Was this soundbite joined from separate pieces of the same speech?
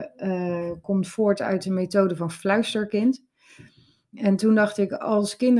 no; 0 cuts

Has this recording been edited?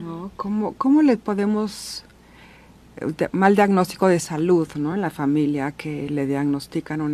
no; 0 cuts

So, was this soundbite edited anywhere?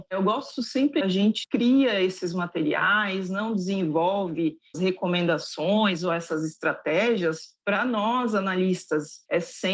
yes; 3 cuts; at 1.0 s, 1.4 s, 4.7 s

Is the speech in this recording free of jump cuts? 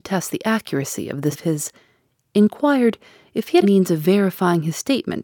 no; 2 cuts; at 1.3 s, 3.6 s

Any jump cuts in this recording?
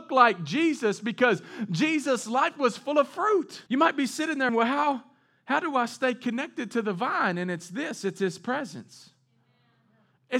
yes; 2 cuts; at 3.7 s, 4.5 s

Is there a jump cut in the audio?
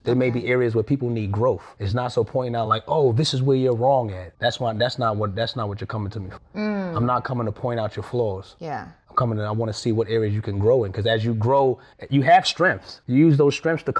no; 0 cuts

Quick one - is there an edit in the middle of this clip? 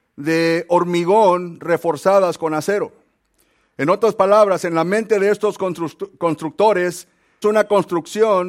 yes; 1 cut; at 7.4 s

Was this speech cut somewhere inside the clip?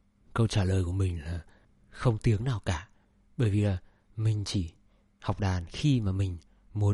no; 0 cuts

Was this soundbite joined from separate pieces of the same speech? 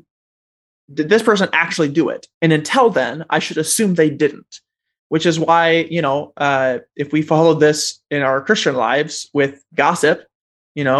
yes; 1 cut; at 2.3 s

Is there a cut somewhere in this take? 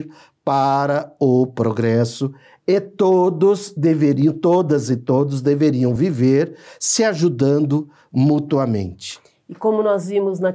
no; 0 cuts

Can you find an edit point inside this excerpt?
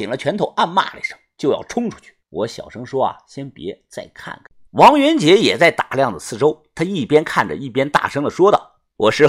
yes; 2 cuts; at 2.2 s, 4.7 s

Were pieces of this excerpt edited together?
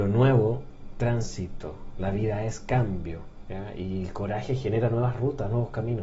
yes; 1 cut; at 0.9 s

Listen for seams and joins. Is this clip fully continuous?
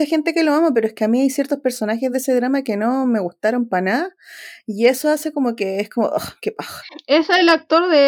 yes; 0 cuts

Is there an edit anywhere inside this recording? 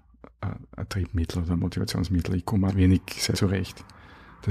yes; 2 cuts; at 2.7 s, 3.3 s

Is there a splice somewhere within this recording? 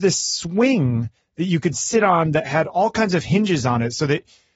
no; 0 cuts

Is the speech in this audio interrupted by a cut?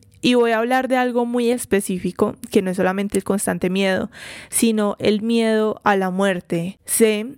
no; 0 cuts

